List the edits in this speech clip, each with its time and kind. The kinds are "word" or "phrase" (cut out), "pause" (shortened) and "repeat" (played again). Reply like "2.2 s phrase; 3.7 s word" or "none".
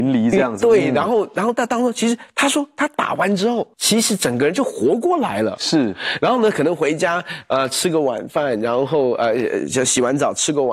3.7 s pause